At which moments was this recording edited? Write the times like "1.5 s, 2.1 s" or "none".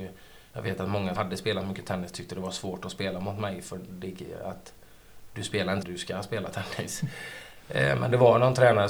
1.2 s, 5.8 s